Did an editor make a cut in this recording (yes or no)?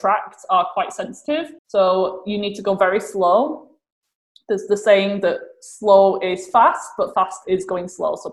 yes